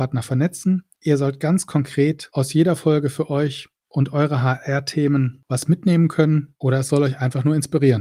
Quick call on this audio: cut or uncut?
cut